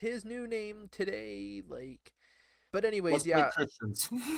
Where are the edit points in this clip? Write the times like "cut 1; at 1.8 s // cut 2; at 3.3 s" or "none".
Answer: cut 1; at 2.7 s